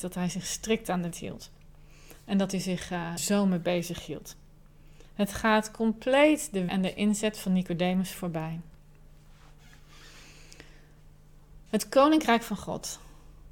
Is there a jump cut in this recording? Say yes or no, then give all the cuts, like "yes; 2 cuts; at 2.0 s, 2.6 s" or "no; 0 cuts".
yes; 5 cuts; at 1.1 s, 3.2 s, 5.1 s, 6.7 s, 11.7 s